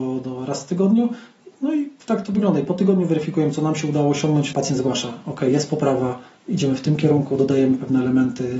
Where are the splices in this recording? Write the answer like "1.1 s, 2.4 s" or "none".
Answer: 2.0 s, 4.5 s

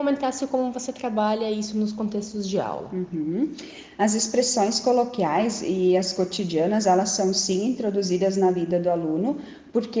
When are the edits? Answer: none

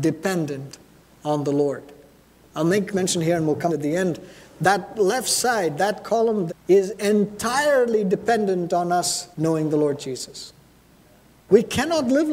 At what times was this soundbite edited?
2.9 s, 3.7 s, 6.5 s, 9.3 s

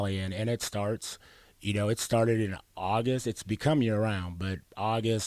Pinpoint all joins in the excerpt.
none

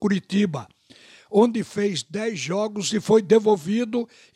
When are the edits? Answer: none

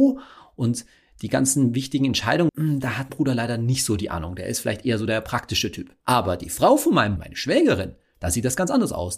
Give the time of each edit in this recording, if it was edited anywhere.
2.5 s, 3.1 s, 6.0 s, 7.2 s

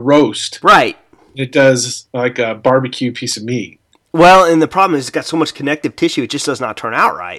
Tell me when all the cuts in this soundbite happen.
none

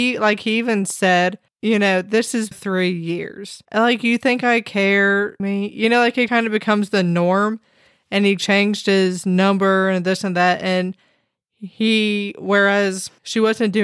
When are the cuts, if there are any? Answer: 2.5 s, 3.6 s, 5.4 s, 6.3 s

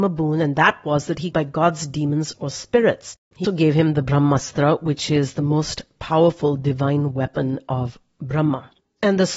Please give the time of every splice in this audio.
1.3 s, 3.4 s

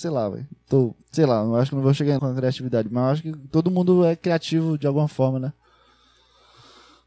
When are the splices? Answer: 1.0 s, 2.2 s

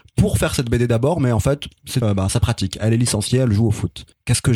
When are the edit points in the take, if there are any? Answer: 2.0 s

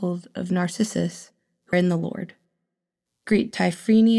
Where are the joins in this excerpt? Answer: 1.7 s

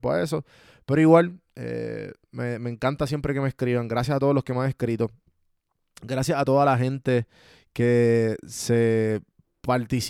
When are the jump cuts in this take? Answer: none

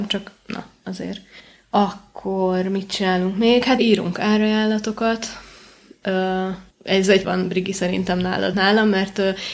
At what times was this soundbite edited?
1.4 s, 3.8 s, 6.7 s, 7.2 s, 8.5 s

